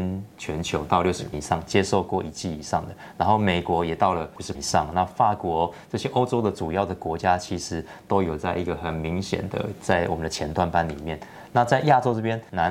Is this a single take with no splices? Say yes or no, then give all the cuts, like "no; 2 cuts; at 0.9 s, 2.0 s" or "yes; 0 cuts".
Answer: no; 2 cuts; at 1.3 s, 4.5 s